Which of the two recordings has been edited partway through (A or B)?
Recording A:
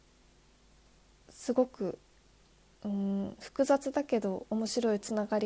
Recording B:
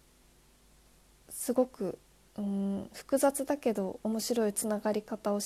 B